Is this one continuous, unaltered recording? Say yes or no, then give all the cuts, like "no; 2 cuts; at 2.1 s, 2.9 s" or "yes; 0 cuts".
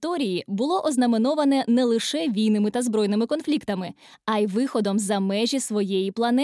yes; 0 cuts